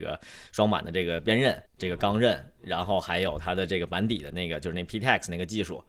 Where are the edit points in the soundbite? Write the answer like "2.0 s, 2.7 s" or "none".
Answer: 1.7 s